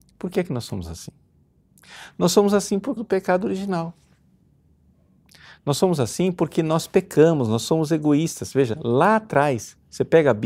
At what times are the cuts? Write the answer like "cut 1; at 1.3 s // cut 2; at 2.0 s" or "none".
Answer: cut 1; at 3.0 s